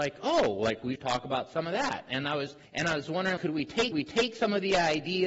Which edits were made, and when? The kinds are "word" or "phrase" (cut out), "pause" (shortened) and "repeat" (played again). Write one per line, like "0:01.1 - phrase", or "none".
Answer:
0:01.0 - word
0:02.6 - pause
0:03.4 - word
0:03.9 - repeat